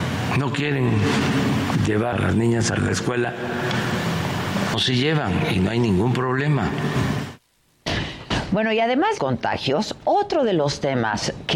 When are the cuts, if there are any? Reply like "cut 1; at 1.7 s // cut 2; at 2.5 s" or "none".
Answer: cut 1; at 2.1 s // cut 2; at 4.7 s // cut 3; at 9.2 s